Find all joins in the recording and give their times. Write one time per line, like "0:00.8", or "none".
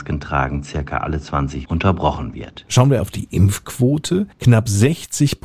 0:01.6
0:03.0
0:04.3